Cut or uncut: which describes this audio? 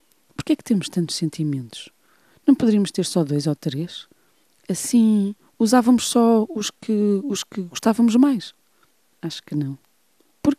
uncut